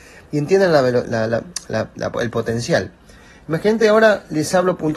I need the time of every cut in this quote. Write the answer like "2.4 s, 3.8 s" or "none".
none